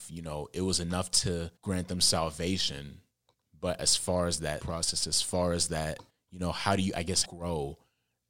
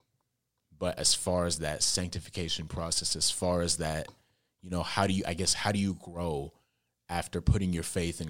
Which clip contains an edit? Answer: first; 5 cuts; at 1.6 s, 3.3 s, 4.6 s, 6.1 s, 7.2 s

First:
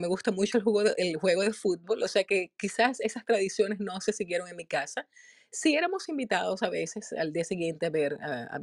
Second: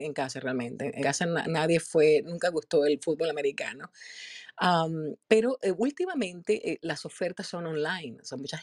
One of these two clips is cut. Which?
second; 2 cuts; at 1.0 s, 5.2 s

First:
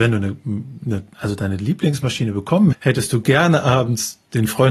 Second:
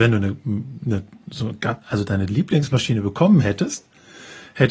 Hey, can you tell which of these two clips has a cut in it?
first; 2 cuts; at 1.1 s, 2.7 s

